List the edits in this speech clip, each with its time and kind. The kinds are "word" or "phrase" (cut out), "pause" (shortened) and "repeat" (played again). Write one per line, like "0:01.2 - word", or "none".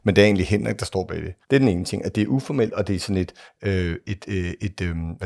0:01.4 - pause
0:03.5 - pause